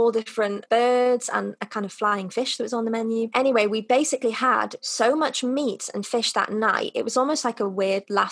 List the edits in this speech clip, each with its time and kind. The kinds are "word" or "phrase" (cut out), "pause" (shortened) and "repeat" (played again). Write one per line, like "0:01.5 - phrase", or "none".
none

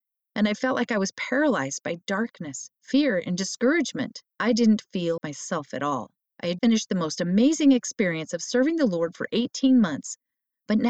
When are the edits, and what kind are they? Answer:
0:02.8 - pause
0:04.3 - pause
0:05.2 - word
0:06.2 - pause
0:06.6 - word

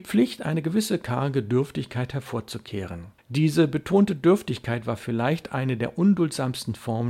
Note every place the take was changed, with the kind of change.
0:03.2 - pause

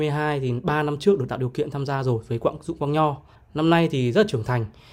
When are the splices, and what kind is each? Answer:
0:03.4 - pause

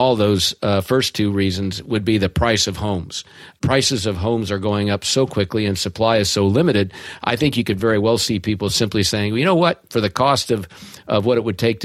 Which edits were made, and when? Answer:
none

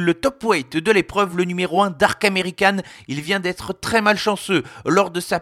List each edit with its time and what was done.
none

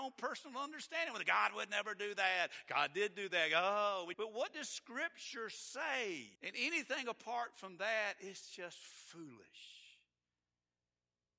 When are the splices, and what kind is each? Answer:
0:04.1 - word
0:06.4 - pause

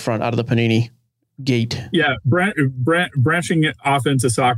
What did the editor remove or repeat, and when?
none

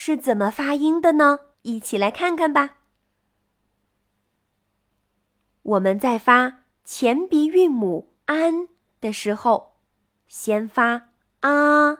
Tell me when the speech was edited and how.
0:01.5 - pause
0:08.2 - pause
0:10.0 - pause

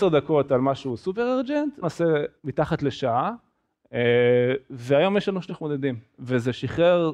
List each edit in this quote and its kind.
0:01.8 - phrase
0:02.4 - pause
0:05.5 - word

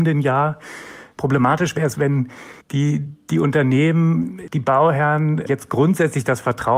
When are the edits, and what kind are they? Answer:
0:01.9 - word
0:02.6 - pause
0:04.5 - word

